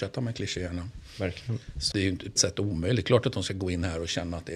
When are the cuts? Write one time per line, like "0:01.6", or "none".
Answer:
0:01.9
0:02.4